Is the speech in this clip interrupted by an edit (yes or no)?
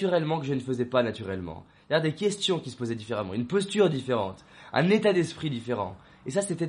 no